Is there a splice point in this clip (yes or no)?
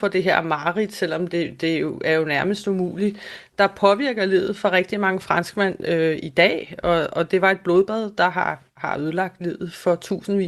no